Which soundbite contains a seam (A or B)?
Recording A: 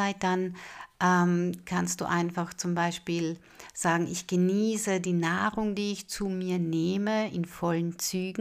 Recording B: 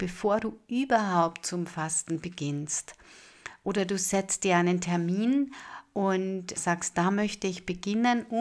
B